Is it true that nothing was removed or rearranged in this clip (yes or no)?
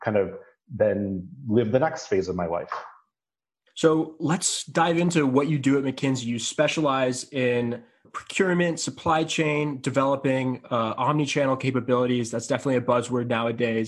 yes